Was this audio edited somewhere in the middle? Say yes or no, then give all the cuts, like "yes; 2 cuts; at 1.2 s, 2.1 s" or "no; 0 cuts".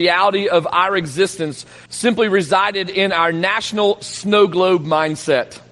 yes; 1 cut; at 1.9 s